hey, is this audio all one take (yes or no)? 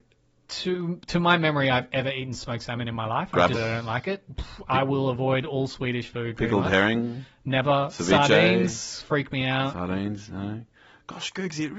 no